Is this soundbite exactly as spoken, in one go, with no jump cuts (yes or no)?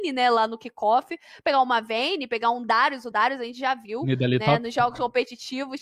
yes